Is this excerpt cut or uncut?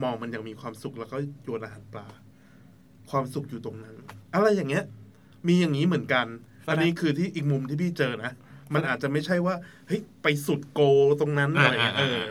uncut